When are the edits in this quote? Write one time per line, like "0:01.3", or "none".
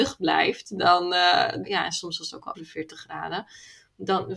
0:01.6
0:02.5